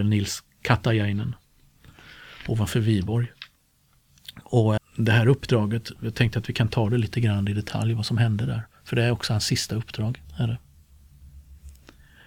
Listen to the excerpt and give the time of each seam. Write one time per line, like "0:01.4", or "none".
0:04.8
0:10.2